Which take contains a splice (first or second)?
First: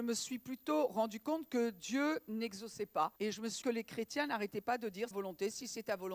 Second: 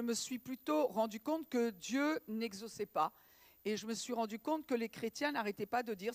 first